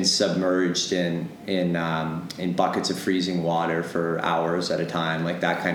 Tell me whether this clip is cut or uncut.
uncut